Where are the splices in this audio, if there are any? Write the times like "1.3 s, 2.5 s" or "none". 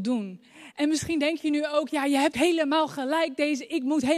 2.3 s